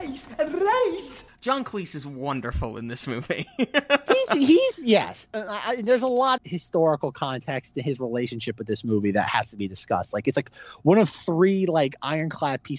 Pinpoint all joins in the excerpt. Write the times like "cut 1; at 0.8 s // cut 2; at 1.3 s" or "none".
cut 1; at 6.4 s